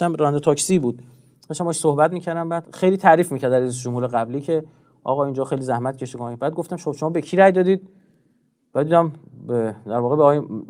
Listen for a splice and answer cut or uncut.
uncut